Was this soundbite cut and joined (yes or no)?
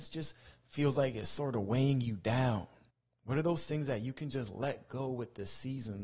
yes